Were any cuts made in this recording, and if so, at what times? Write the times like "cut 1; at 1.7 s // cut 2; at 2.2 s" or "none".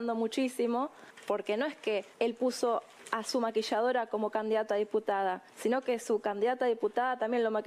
cut 1; at 2.1 s // cut 2; at 5.5 s

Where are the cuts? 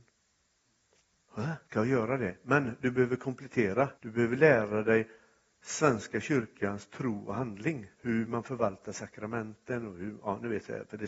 cut 1; at 1.7 s // cut 2; at 3.9 s // cut 3; at 7.9 s

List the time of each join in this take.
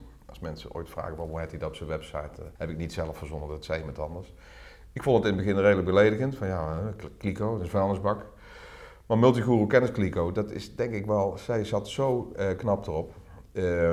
cut 1; at 2.6 s

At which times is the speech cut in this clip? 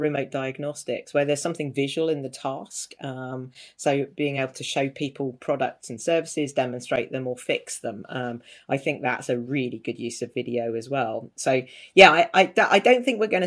none

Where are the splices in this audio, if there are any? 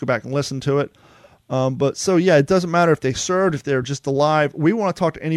none

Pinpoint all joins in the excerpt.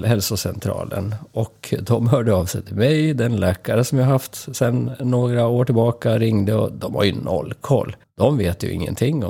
cut 1; at 8.0 s

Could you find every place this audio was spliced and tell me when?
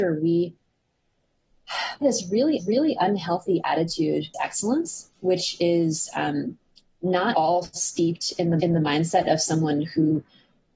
cut 1; at 2.0 s // cut 2; at 2.6 s // cut 3; at 4.3 s // cut 4; at 7.3 s // cut 5; at 8.6 s

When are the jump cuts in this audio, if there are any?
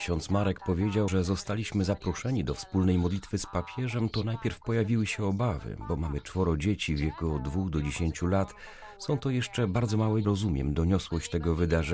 cut 1; at 1.1 s // cut 2; at 10.2 s

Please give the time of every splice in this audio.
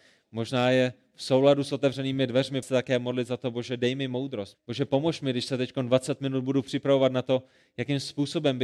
cut 1; at 2.6 s // cut 2; at 4.5 s

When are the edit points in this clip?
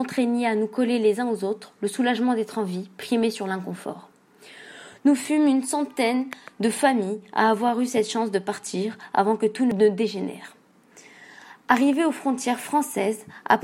none

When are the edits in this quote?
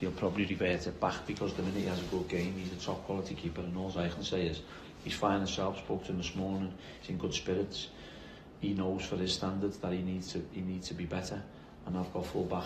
none

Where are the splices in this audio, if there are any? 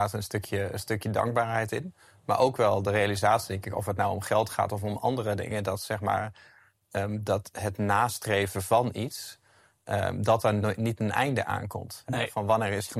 none

